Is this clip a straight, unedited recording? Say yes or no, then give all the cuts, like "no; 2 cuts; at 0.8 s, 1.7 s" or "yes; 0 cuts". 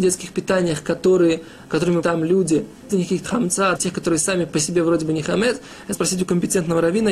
no; 5 cuts; at 2.0 s, 2.9 s, 3.2 s, 3.8 s, 5.9 s